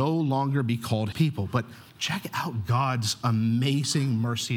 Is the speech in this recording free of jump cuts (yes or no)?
no